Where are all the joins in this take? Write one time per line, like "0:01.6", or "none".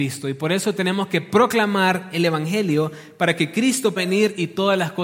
0:04.0